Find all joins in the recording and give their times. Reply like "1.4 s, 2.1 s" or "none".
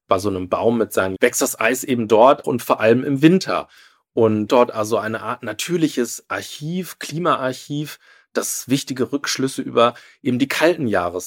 1.2 s, 2.4 s, 4.5 s